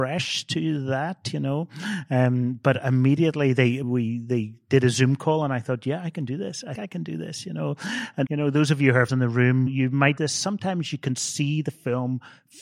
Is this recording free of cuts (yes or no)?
no